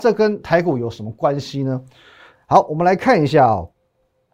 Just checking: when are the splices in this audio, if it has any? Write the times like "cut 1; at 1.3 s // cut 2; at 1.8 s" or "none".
none